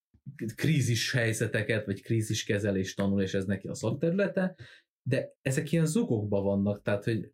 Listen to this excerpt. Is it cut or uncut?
cut